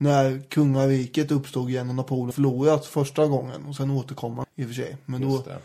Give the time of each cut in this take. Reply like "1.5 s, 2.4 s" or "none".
2.3 s, 4.4 s